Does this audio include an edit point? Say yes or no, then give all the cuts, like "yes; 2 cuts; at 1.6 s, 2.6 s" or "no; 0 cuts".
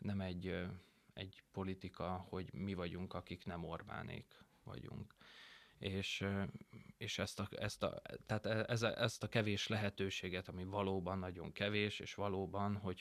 no; 0 cuts